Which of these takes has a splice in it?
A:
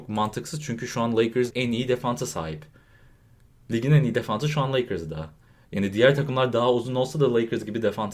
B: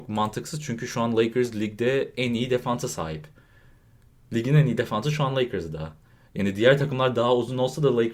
A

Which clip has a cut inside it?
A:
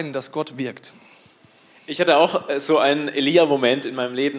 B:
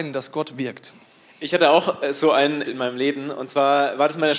B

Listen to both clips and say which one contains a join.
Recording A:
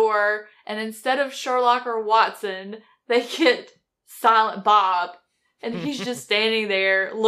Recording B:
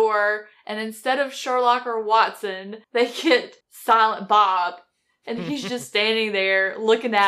B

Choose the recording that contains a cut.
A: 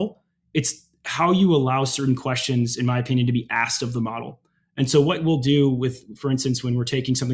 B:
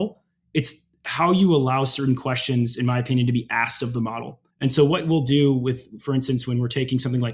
B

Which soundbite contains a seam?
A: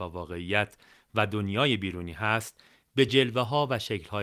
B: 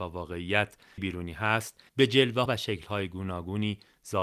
B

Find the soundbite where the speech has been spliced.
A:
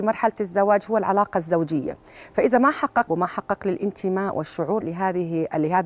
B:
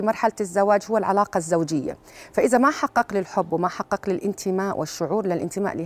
A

